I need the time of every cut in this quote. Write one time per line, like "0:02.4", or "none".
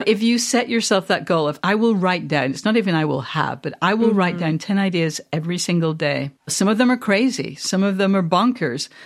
0:06.4